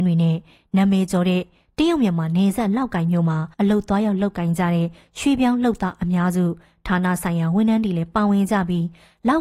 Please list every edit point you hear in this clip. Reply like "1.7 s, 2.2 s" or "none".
3.5 s